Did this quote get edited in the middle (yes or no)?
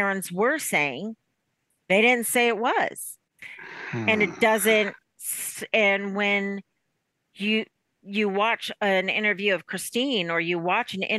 no